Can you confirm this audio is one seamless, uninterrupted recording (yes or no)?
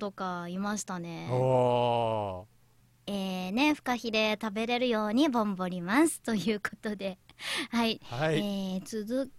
yes